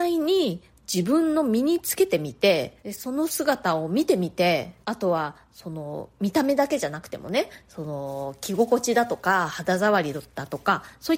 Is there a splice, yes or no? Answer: yes